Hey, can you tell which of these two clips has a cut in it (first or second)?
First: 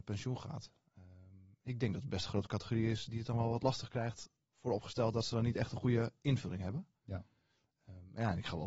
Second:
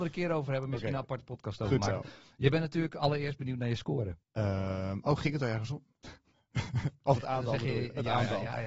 second